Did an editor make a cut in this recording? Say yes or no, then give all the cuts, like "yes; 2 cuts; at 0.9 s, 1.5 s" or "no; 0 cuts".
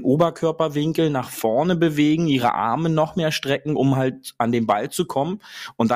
no; 0 cuts